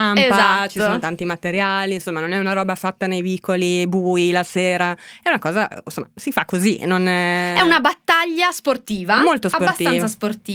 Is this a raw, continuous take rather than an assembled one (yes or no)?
yes